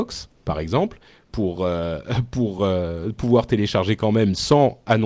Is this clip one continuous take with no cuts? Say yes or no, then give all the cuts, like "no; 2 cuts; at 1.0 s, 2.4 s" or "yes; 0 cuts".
yes; 0 cuts